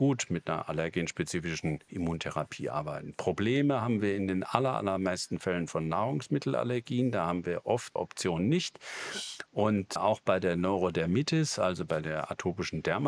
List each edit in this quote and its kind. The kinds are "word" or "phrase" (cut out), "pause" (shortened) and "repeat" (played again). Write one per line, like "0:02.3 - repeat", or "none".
0:08.0 - word
0:10.0 - word